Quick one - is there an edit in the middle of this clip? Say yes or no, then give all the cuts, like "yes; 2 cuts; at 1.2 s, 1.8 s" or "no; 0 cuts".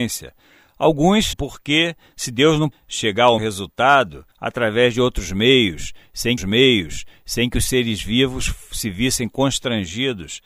yes; 5 cuts; at 1.3 s, 2.7 s, 3.4 s, 4.3 s, 6.4 s